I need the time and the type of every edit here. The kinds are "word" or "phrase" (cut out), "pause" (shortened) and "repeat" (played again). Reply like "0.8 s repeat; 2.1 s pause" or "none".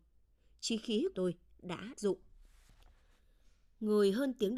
1.1 s word; 2.0 s word